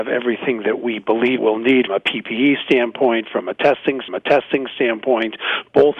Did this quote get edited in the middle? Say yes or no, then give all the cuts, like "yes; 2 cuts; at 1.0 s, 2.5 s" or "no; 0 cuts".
yes; 3 cuts; at 1.4 s, 1.9 s, 4.1 s